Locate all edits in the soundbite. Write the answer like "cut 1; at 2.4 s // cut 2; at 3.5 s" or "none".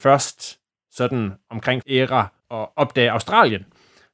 cut 1; at 1.8 s // cut 2; at 2.4 s